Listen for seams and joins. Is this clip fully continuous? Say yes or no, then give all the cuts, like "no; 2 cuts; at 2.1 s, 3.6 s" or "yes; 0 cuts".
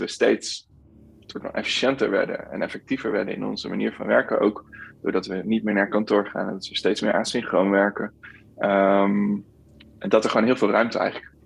yes; 0 cuts